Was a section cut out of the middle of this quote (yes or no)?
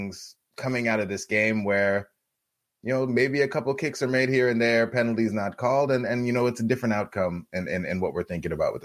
no